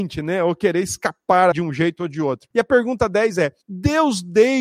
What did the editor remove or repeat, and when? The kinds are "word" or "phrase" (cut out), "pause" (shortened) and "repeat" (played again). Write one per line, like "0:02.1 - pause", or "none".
0:01.5 - word
0:02.5 - pause
0:03.6 - pause